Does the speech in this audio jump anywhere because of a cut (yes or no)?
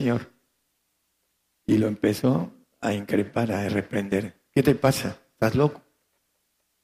no